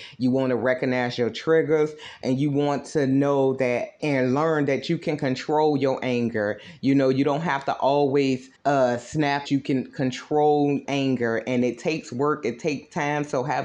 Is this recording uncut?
no; 4 cuts; at 4.0 s, 8.5 s, 9.4 s, 10.8 s

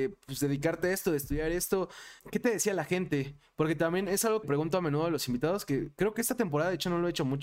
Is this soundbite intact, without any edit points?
no; 2 cuts; at 2.2 s, 4.4 s

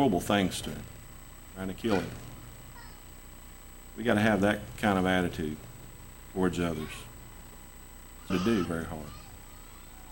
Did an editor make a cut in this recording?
yes; 2 cuts; at 8.3 s, 8.7 s

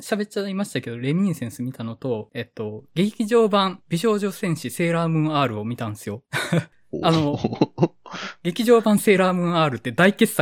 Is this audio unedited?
no; 1 cut; at 2.3 s

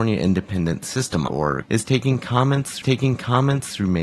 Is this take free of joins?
no; 3 cuts; at 1.3 s, 1.6 s, 2.8 s

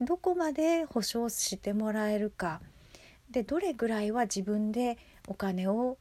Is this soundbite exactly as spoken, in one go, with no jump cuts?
yes; 0 cuts

